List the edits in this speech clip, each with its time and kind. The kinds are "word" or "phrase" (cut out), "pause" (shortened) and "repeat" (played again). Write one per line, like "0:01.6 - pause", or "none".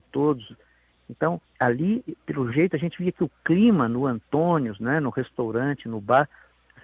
0:01.4 - pause